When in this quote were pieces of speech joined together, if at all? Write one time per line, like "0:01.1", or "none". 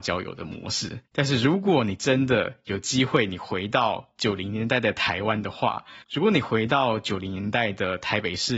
0:01.1
0:06.0